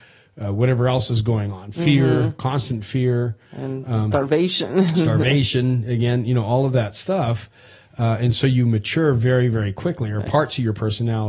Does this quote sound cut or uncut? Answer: uncut